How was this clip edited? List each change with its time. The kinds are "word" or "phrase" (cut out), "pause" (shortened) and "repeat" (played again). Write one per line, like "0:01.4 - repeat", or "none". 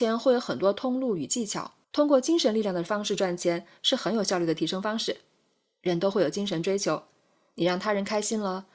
0:01.8 - pause